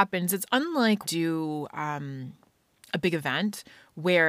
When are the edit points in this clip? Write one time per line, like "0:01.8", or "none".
0:01.0